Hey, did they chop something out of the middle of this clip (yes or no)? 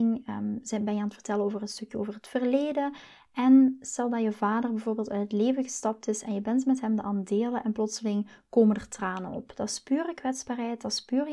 no